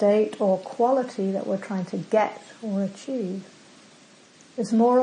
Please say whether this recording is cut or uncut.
uncut